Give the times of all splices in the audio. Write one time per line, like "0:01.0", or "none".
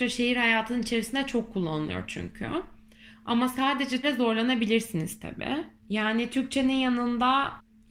0:04.0
0:05.8